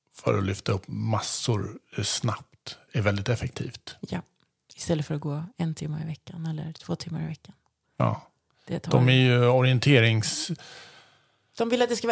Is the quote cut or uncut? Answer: cut